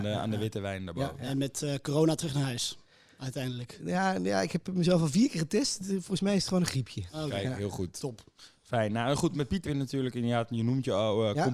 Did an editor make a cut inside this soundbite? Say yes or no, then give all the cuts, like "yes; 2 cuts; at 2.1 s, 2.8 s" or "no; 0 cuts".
yes; 1 cut; at 9.7 s